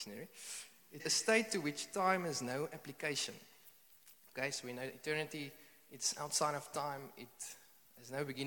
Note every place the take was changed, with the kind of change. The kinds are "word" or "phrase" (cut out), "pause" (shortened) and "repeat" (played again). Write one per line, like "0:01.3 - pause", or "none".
0:01.0 - word